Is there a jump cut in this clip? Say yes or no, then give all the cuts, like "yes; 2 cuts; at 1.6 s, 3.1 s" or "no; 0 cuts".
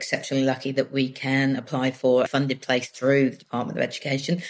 yes; 1 cut; at 2.3 s